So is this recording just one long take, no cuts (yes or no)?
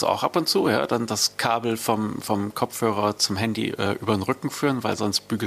yes